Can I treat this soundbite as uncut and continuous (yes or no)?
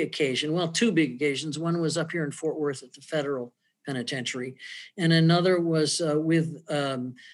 yes